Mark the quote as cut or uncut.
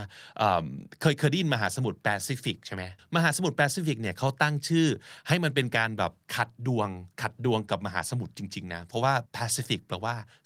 cut